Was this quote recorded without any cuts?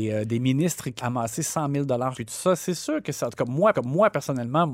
no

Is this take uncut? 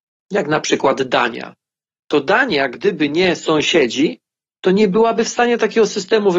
yes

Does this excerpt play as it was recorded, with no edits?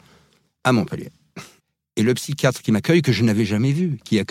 no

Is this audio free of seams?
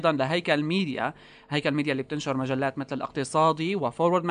yes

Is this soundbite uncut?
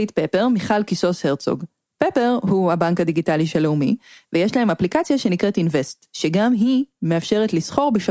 yes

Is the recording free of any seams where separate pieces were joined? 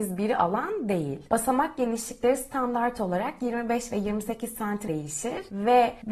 no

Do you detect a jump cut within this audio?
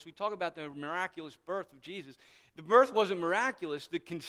no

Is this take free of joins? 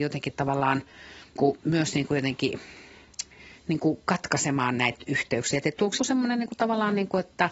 no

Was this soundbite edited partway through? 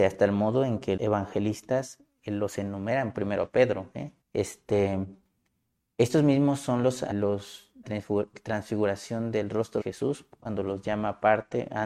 yes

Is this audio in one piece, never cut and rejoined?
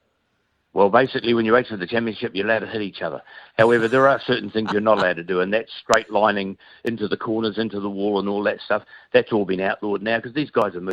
yes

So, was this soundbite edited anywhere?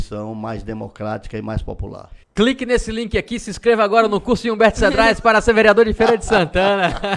yes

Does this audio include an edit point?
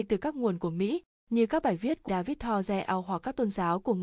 yes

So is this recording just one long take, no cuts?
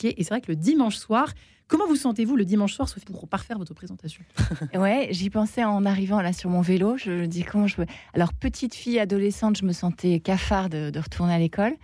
no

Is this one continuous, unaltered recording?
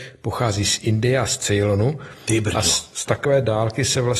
yes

